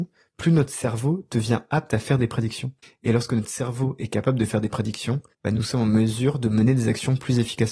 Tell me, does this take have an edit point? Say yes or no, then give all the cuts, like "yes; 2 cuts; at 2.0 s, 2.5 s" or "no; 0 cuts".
yes; 2 cuts; at 2.8 s, 5.3 s